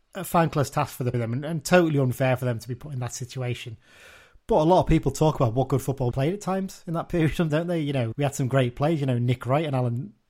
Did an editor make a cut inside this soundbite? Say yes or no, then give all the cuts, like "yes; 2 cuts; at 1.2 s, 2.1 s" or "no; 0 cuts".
yes; 4 cuts; at 1.1 s, 6.1 s, 7.5 s, 8.1 s